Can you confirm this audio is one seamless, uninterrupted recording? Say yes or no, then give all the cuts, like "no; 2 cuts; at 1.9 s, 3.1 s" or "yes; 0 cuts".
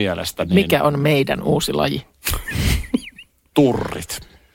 yes; 0 cuts